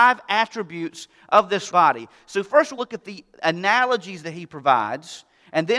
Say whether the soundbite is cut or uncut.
cut